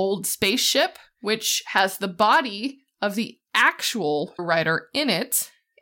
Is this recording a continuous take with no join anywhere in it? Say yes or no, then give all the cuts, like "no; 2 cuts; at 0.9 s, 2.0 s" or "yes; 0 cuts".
no; 1 cut; at 4.4 s